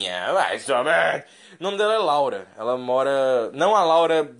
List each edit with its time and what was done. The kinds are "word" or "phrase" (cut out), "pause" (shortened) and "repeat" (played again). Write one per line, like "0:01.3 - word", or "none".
none